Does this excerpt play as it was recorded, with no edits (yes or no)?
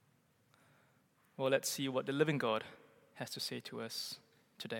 yes